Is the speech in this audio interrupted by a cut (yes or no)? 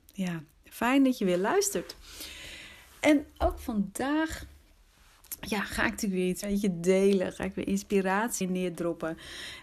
yes